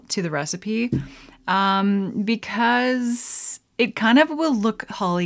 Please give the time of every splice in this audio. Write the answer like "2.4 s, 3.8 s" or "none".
none